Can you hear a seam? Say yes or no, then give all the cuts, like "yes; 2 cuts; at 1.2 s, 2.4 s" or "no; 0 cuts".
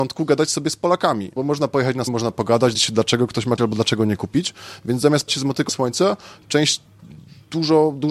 yes; 6 cuts; at 1.4 s, 2.1 s, 2.7 s, 3.6 s, 5.3 s, 5.7 s